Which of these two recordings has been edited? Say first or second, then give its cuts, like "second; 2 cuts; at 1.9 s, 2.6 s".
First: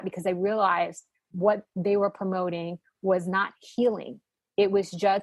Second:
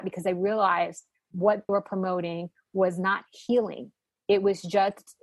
second; 1 cut; at 1.7 s